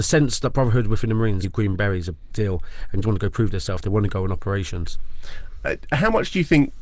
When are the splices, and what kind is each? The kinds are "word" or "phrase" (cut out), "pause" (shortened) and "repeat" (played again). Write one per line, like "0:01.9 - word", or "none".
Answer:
0:01.4 - word
0:02.3 - word
0:03.0 - word